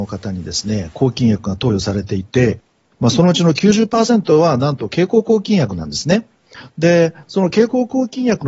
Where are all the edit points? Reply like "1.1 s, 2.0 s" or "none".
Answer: none